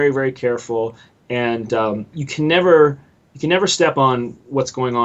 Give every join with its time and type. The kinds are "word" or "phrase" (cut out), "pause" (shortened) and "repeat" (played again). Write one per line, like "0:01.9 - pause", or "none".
none